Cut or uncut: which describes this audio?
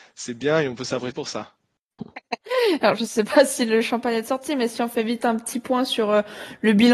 cut